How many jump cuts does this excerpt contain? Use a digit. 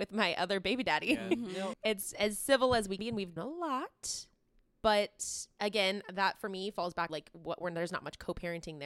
4